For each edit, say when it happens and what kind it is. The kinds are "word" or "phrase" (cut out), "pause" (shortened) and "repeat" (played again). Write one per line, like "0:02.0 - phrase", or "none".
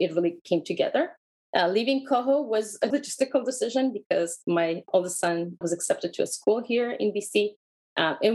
0:01.3 - pause
0:02.9 - phrase
0:05.6 - word